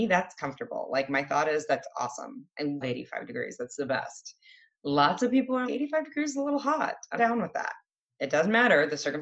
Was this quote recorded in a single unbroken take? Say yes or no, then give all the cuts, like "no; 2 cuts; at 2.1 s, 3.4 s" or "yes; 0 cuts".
no; 3 cuts; at 2.8 s, 5.6 s, 7.2 s